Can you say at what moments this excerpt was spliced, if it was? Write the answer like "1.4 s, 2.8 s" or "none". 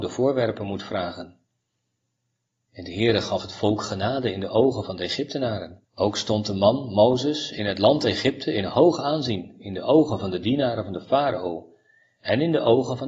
5.8 s